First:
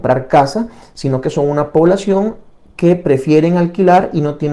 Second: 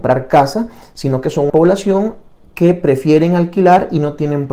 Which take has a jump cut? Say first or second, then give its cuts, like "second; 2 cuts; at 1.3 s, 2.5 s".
second; 1 cut; at 1.5 s